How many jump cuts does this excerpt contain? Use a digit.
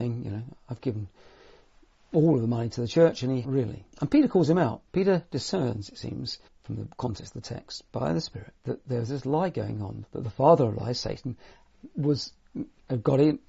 6